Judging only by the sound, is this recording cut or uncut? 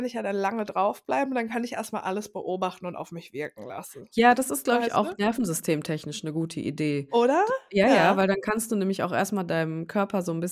uncut